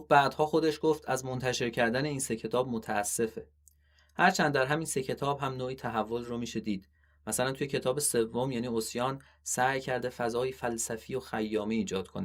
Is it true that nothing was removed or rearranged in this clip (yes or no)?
yes